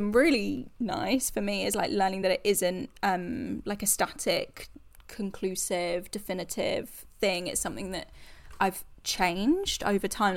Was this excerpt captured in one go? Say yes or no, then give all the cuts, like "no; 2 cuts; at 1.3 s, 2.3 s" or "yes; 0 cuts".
yes; 0 cuts